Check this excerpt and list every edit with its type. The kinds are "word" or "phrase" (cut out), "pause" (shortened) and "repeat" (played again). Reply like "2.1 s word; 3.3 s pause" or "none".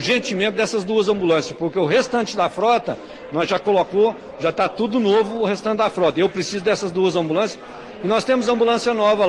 none